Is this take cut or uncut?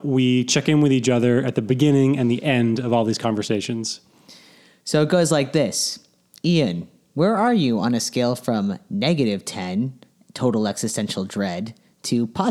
uncut